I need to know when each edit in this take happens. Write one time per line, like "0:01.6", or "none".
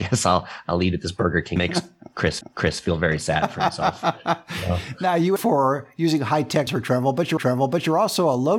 0:01.6
0:02.4
0:05.4
0:06.7
0:07.4